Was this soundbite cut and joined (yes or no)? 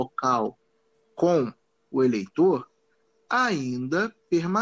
no